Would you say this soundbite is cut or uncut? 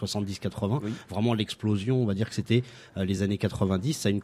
uncut